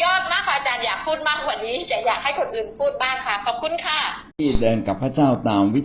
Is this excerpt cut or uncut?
cut